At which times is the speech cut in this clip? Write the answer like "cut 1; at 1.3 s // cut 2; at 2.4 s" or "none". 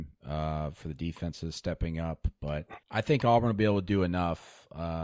cut 1; at 2.8 s